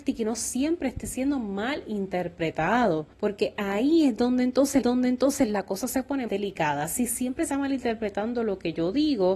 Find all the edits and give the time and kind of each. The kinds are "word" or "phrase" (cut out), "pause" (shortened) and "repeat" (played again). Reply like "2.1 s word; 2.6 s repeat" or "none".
3.1 s pause; 4.8 s repeat; 6.3 s word; 7.5 s word